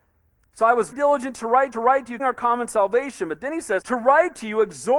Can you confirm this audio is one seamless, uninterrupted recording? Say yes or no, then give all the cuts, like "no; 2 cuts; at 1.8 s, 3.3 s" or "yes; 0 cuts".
no; 4 cuts; at 0.9 s, 1.7 s, 2.2 s, 3.8 s